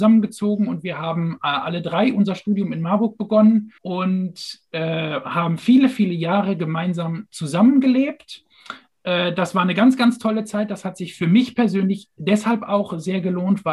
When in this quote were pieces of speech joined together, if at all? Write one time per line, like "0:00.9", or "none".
0:03.8